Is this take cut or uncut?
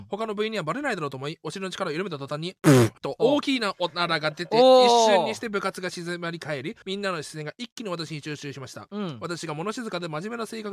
cut